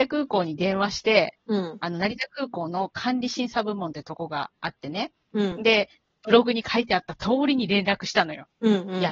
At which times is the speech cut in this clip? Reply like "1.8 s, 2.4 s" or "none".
none